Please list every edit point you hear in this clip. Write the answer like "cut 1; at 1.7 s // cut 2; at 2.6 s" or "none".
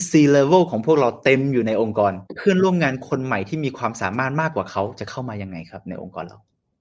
cut 1; at 2.3 s

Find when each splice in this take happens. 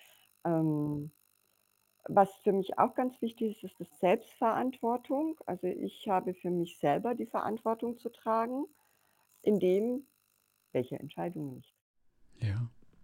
cut 1; at 3.9 s // cut 2; at 9.3 s

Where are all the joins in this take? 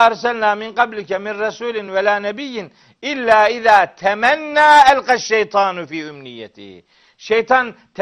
none

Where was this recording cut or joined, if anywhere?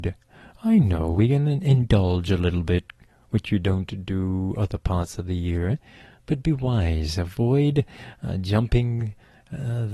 none

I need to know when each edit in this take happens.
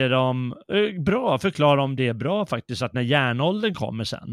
none

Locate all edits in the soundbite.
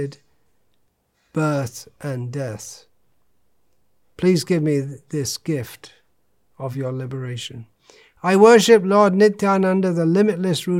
none

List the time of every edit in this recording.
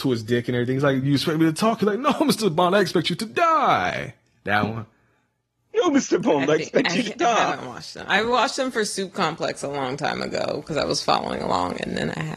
none

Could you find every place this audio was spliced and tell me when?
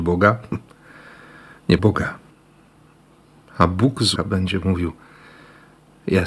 cut 1; at 1.8 s // cut 2; at 4.2 s

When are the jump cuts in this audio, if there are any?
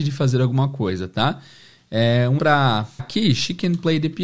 cut 1; at 2.4 s // cut 2; at 3.0 s

